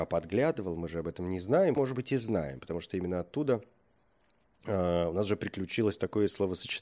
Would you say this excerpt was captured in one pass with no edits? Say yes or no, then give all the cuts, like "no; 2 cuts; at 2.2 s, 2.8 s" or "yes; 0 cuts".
no; 1 cut; at 1.8 s